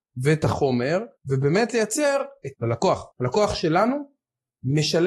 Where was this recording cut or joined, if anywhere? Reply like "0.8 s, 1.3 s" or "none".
1.2 s, 2.5 s, 3.1 s